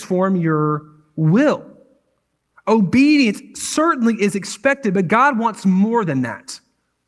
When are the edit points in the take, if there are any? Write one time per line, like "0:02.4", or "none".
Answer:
none